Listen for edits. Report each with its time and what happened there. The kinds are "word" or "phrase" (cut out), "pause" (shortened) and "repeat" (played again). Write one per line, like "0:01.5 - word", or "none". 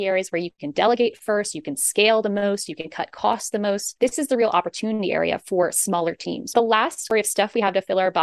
none